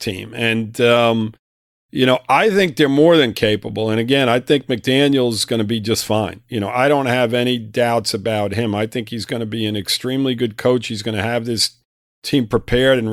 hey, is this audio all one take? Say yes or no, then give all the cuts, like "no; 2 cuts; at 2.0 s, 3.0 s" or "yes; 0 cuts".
yes; 0 cuts